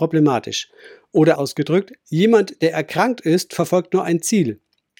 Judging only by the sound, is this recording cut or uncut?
cut